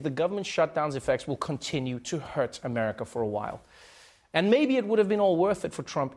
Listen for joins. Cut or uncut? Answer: uncut